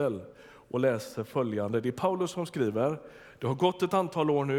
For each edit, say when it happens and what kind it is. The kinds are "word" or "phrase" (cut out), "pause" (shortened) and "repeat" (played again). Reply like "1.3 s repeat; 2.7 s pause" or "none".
none